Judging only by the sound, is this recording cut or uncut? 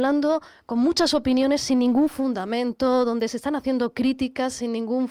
uncut